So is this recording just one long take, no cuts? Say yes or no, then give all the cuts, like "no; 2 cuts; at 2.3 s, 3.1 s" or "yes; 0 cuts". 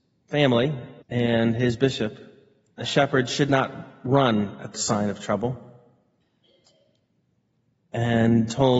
no; 3 cuts; at 1.0 s, 2.8 s, 4.7 s